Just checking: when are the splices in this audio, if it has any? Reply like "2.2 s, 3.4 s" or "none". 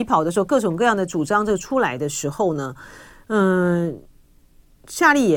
none